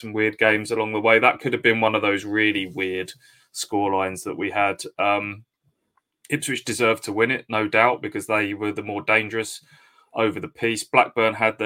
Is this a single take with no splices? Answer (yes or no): yes